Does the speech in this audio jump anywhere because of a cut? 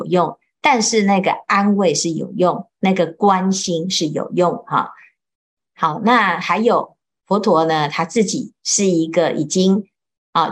no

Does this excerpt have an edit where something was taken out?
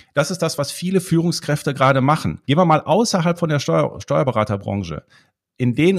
yes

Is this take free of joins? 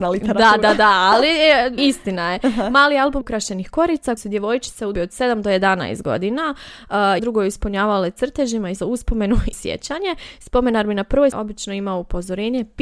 no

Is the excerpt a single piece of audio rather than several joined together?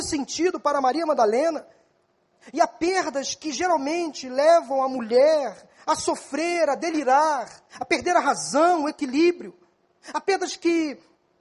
no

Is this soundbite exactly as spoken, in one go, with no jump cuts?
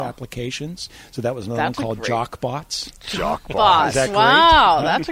yes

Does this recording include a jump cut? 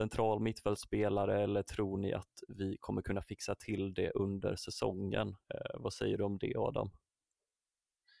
yes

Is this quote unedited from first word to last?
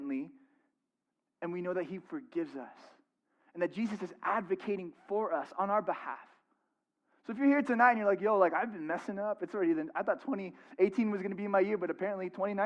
yes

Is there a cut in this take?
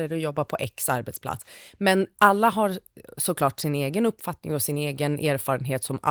no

